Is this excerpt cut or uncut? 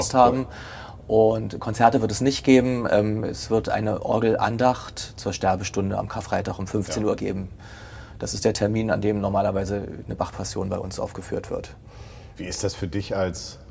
uncut